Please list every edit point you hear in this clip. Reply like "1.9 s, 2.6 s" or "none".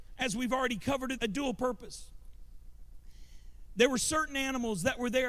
1.2 s